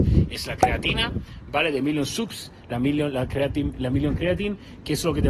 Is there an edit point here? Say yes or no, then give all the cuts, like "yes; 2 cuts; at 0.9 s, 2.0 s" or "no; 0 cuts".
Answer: no; 0 cuts